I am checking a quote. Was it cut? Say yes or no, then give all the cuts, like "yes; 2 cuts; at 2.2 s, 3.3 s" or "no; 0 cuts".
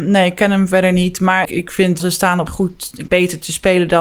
yes; 4 cuts; at 1.4 s, 2.0 s, 2.5 s, 3.1 s